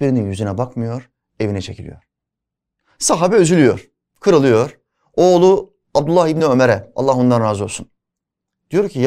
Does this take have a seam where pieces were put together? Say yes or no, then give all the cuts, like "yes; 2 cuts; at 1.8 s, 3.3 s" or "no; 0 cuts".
no; 0 cuts